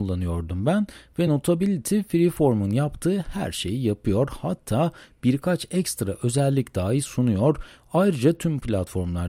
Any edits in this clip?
no; 0 cuts

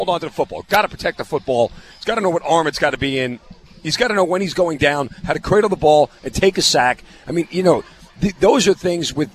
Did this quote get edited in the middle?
no; 0 cuts

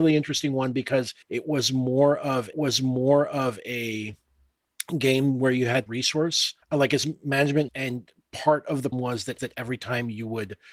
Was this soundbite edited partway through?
yes; 7 cuts; at 1.2 s, 2.5 s, 5.9 s, 6.6 s, 7.7 s, 8.9 s, 9.4 s

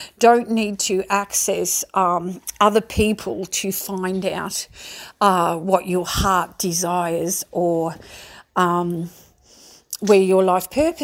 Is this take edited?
no; 0 cuts

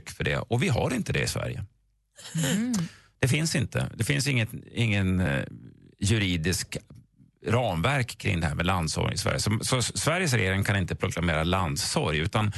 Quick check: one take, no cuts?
yes; 0 cuts

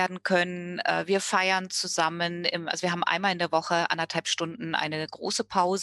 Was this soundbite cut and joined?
no; 0 cuts

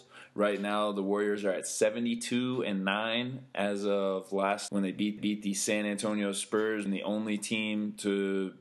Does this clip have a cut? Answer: yes; 3 cuts; at 4.7 s, 5.2 s, 6.9 s

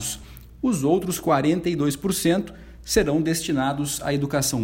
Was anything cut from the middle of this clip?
no; 0 cuts

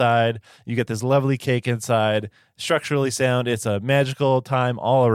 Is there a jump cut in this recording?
no; 0 cuts

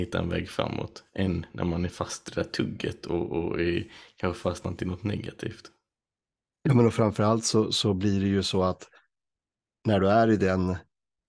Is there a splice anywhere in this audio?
no; 0 cuts

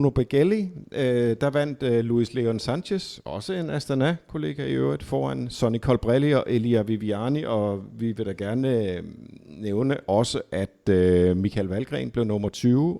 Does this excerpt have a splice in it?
no; 0 cuts

